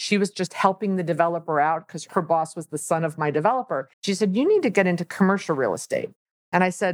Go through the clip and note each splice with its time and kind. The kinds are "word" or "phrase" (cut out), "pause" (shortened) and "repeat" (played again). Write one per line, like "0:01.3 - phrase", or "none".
0:03.9 - pause